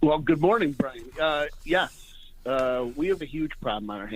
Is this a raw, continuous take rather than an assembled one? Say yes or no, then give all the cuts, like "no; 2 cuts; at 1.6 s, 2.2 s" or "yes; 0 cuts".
no; 1 cut; at 3.2 s